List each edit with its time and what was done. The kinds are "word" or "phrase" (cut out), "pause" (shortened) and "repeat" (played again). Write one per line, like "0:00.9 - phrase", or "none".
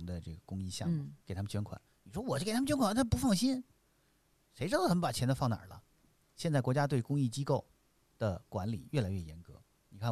0:01.2 - pause
0:01.9 - pause